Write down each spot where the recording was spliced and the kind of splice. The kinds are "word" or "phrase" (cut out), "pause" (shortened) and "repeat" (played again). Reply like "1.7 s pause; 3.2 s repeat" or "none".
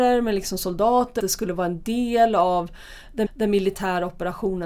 1.2 s word; 3.3 s repeat